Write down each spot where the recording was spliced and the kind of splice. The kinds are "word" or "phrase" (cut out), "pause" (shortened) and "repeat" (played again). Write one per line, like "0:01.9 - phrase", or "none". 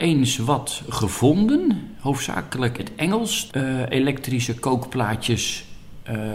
0:02.8 - word
0:03.5 - phrase